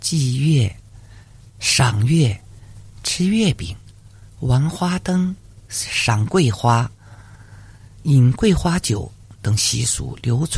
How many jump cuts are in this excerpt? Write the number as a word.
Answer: zero